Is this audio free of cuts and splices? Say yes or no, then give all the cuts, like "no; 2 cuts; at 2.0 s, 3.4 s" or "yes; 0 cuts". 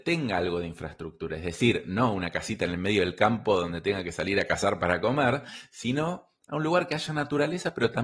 yes; 0 cuts